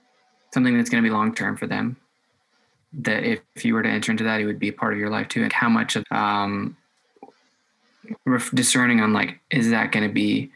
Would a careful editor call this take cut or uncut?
cut